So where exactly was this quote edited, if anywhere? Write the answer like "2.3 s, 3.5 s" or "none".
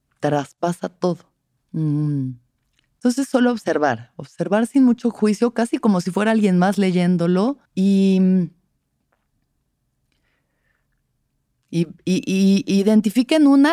1.6 s, 7.7 s